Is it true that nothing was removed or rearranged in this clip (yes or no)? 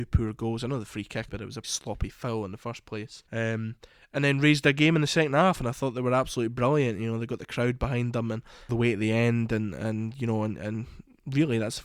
no